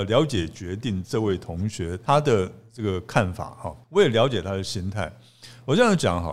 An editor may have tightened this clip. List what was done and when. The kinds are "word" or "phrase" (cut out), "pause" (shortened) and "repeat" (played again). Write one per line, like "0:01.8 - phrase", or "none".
0:02.1 - word
0:03.8 - pause